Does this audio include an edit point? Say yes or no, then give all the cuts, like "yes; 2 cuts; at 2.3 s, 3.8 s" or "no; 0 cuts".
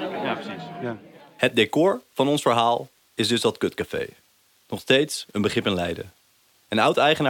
no; 0 cuts